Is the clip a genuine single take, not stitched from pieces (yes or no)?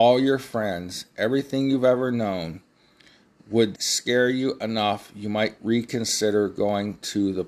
no